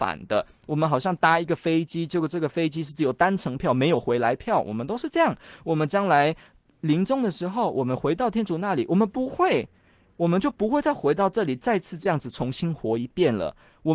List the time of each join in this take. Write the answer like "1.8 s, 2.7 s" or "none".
none